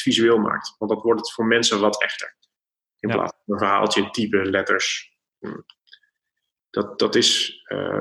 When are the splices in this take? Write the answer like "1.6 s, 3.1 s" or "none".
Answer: none